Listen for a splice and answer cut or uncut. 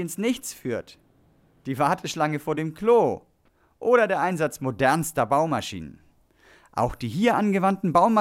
uncut